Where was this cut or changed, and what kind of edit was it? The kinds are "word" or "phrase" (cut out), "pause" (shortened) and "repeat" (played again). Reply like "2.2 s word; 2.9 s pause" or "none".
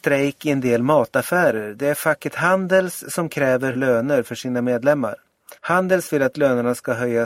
3.7 s word; 5.6 s pause